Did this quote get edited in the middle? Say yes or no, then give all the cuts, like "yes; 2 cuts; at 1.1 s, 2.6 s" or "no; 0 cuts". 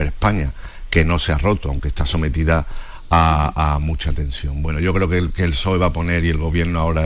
no; 0 cuts